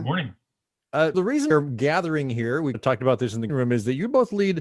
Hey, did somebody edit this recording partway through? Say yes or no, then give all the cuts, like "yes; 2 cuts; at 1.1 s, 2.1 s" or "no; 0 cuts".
yes; 4 cuts; at 1.1 s, 1.5 s, 2.7 s, 3.5 s